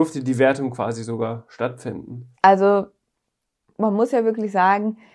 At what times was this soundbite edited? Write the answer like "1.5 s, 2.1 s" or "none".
2.3 s